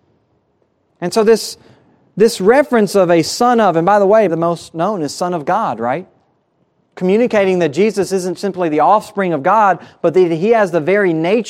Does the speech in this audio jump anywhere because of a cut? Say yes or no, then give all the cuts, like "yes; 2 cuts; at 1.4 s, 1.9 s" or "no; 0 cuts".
yes; 1 cut; at 4.3 s